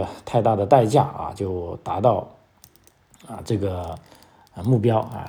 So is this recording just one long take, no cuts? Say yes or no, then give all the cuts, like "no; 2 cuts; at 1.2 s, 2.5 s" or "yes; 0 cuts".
yes; 0 cuts